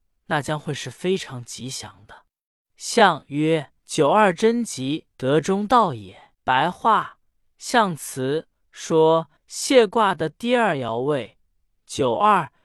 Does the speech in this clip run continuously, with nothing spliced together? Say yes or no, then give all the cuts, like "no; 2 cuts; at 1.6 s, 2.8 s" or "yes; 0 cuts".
no; 5 cuts; at 2.5 s, 3.8 s, 5.1 s, 6.3 s, 9.4 s